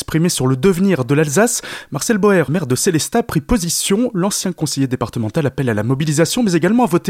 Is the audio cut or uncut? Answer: cut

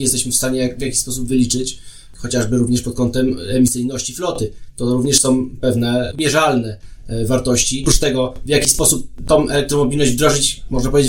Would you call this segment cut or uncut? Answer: uncut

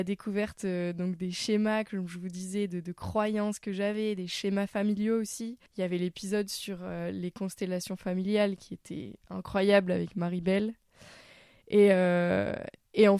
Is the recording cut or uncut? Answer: cut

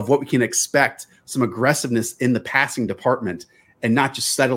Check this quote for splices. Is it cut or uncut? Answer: uncut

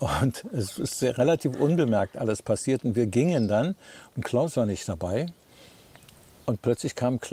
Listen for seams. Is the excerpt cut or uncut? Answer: uncut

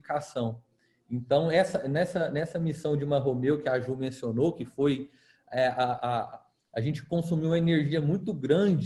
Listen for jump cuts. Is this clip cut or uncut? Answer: uncut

